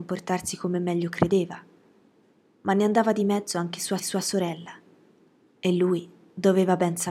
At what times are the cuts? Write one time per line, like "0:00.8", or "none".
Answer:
0:04.0